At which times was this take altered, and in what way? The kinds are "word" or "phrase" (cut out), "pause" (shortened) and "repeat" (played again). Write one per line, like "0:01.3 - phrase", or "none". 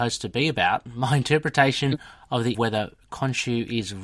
0:02.5 - phrase